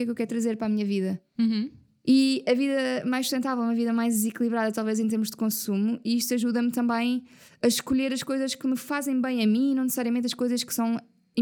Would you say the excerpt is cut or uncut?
uncut